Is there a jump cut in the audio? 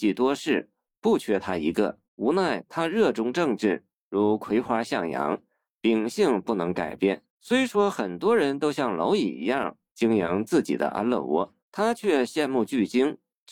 yes; 3 cuts; at 2.0 s, 7.3 s, 11.6 s

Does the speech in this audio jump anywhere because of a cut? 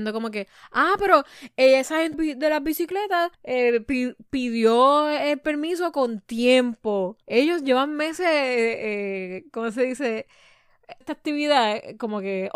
yes; 4 cuts; at 2.1 s, 3.3 s, 7.2 s, 11.0 s

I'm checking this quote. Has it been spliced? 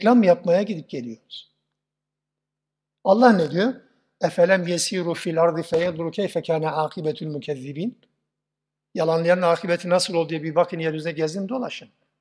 no; 0 cuts

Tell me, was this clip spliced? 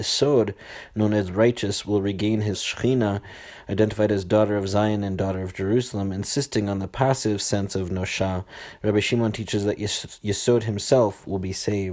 yes; 1 cut; at 2.5 s

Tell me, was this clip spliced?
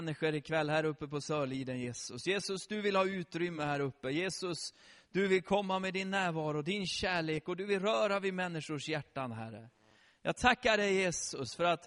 no; 0 cuts

